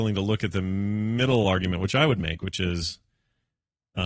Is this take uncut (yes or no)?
yes